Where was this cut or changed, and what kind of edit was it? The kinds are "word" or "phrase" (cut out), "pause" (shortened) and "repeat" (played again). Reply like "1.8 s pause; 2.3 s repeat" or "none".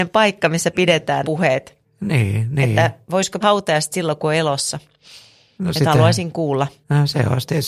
1.2 s phrase; 3.4 s word